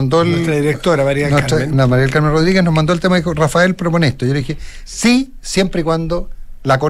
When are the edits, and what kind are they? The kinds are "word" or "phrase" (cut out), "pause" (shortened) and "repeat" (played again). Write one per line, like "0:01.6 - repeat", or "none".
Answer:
none